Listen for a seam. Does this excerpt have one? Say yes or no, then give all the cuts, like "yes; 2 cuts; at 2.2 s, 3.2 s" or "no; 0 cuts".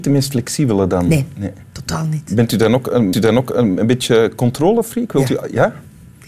yes; 1 cut; at 3.1 s